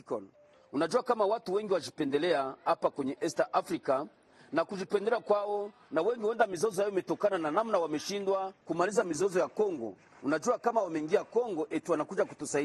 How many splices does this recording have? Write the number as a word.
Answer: one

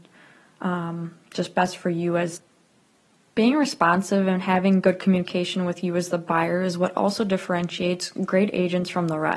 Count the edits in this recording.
zero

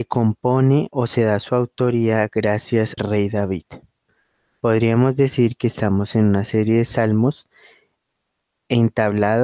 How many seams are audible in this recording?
one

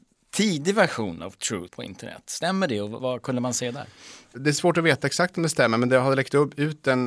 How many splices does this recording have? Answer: two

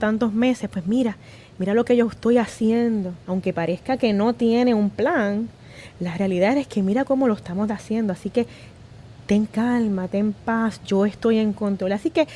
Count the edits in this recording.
one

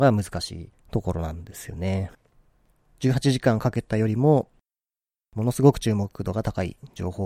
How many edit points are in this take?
zero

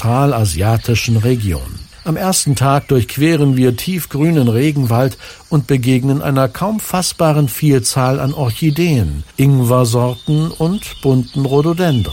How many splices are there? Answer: two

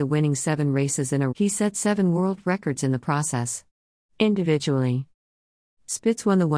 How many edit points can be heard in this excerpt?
one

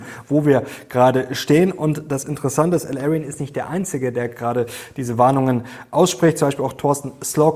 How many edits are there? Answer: zero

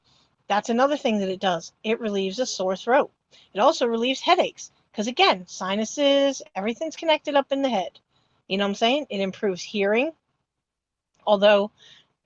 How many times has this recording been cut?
zero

